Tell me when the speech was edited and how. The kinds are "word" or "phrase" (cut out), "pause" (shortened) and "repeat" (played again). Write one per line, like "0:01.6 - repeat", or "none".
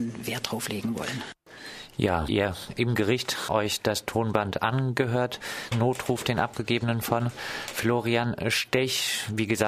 0:02.3 - word
0:03.5 - word
0:05.7 - word